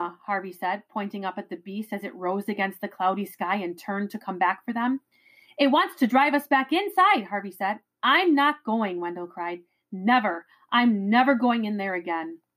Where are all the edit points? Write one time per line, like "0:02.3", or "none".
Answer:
none